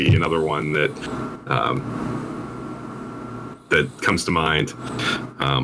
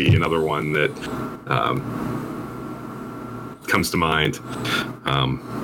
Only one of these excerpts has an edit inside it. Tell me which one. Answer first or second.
second